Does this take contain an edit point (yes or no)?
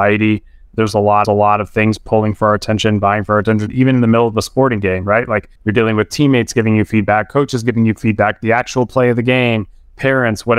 yes